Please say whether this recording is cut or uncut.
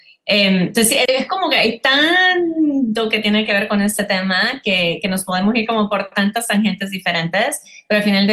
cut